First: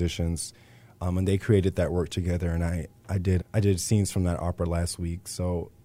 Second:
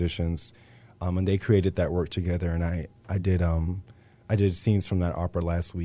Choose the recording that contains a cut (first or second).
first